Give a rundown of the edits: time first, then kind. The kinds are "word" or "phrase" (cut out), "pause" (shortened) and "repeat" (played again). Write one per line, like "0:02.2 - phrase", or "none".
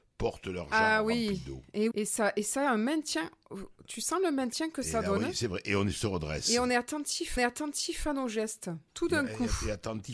0:01.9 - word
0:07.4 - repeat
0:08.9 - pause